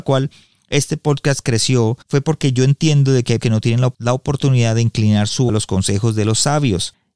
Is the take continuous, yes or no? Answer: no